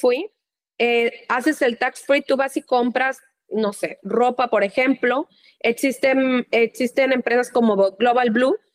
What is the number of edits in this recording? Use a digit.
0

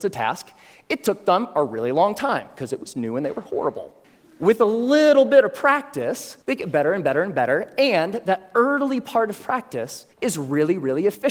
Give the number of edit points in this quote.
3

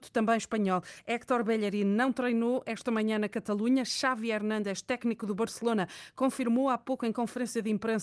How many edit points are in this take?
0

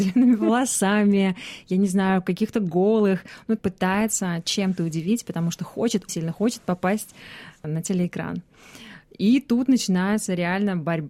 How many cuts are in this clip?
2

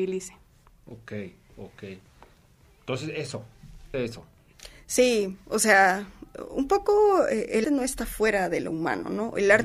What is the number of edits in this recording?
2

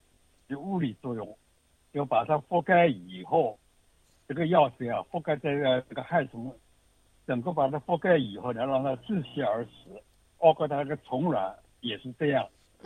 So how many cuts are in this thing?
1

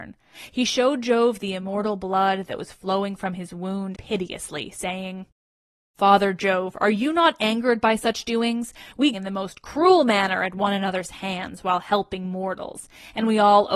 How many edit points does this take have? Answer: 2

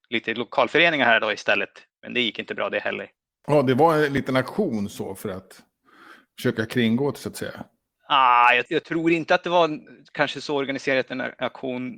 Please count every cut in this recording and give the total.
0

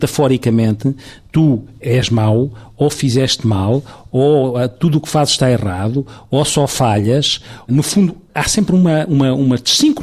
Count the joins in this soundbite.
0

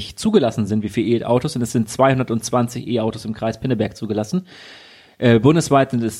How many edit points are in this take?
0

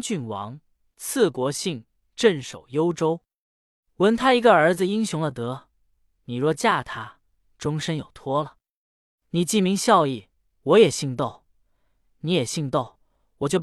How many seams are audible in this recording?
0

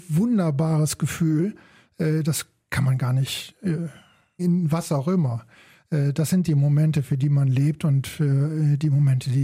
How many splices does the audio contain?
1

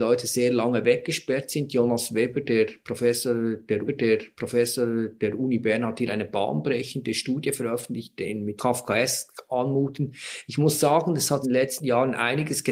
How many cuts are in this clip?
3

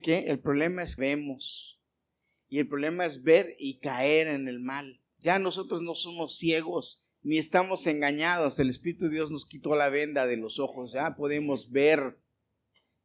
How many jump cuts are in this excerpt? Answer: 2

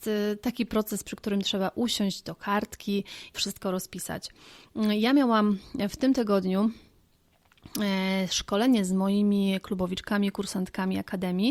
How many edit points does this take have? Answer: 1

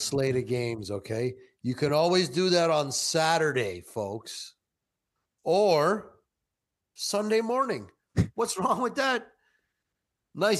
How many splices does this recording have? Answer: 0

